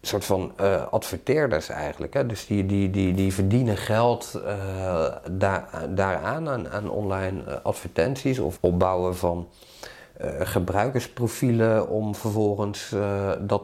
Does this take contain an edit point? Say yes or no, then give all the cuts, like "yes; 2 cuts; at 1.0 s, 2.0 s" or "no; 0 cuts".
yes; 1 cut; at 8.6 s